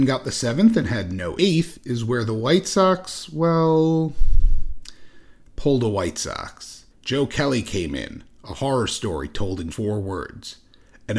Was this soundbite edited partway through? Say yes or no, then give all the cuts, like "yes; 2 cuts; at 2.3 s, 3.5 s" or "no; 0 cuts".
yes; 3 cuts; at 1.4 s, 6.9 s, 9.7 s